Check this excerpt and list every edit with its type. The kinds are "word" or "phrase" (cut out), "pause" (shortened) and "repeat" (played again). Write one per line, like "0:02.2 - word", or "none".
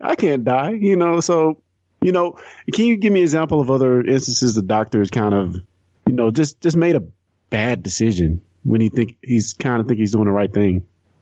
none